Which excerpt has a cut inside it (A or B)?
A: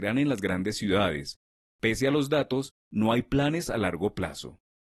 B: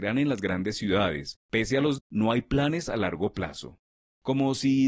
B